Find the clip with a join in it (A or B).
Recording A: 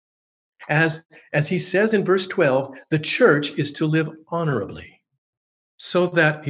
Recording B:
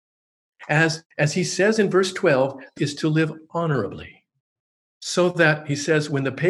B